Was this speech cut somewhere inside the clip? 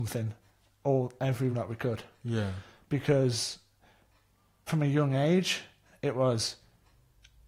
yes; 2 cuts; at 1.5 s, 4.7 s

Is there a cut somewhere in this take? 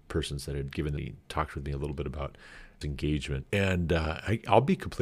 yes; 2 cuts; at 1.0 s, 2.8 s

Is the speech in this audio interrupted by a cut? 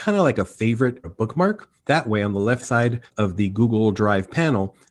yes; 4 cuts; at 1.0 s, 1.8 s, 2.6 s, 3.1 s

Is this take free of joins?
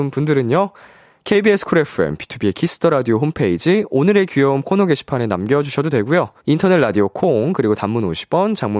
no; 1 cut; at 6.4 s

